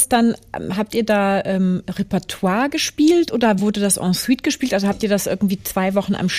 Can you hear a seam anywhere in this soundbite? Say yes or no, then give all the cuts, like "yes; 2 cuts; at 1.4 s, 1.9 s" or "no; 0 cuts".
no; 0 cuts